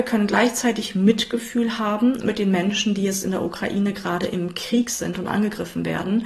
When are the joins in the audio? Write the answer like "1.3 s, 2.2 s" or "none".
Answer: none